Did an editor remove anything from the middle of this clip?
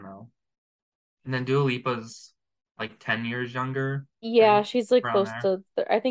no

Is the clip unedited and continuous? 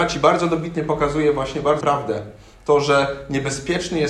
no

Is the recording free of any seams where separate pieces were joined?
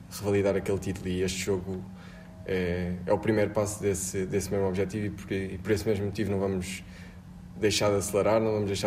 yes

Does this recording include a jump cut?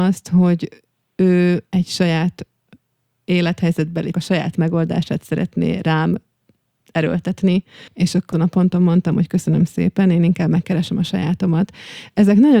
yes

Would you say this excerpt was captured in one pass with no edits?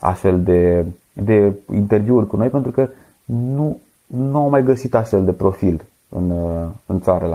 yes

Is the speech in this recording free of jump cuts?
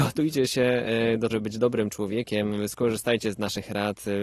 no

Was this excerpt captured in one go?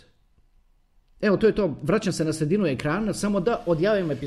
yes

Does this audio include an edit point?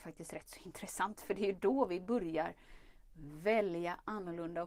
no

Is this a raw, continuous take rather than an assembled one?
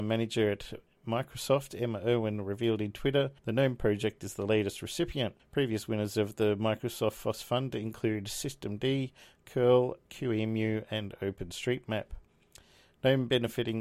no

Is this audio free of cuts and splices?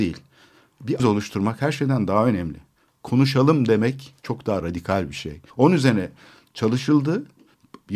no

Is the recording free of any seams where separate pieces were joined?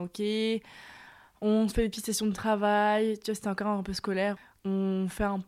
yes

